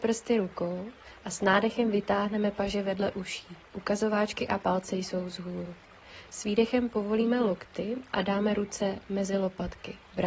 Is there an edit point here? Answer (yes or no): no